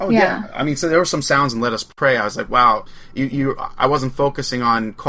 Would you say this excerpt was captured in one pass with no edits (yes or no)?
yes